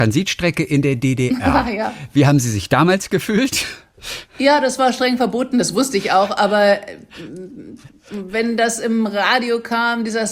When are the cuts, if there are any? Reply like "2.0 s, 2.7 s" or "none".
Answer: none